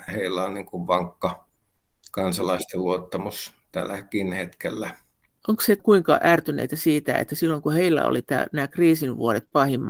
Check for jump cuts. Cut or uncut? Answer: uncut